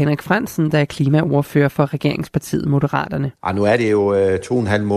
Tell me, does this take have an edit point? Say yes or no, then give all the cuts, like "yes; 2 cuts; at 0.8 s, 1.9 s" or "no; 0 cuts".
yes; 1 cut; at 3.4 s